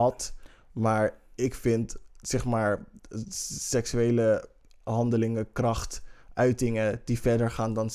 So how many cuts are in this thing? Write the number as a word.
zero